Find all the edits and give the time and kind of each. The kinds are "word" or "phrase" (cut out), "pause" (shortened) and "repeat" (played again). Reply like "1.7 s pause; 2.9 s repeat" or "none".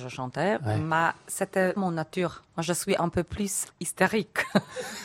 1.8 s phrase; 2.5 s pause; 3.6 s word